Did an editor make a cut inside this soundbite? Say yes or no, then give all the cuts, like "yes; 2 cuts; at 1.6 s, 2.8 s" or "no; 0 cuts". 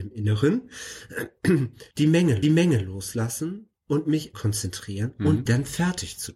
yes; 4 cuts; at 1.9 s, 2.4 s, 4.3 s, 5.5 s